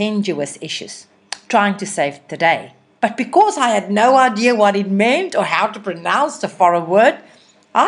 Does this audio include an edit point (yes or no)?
no